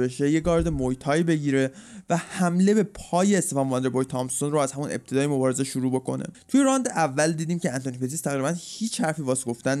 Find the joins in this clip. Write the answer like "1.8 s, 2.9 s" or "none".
6.3 s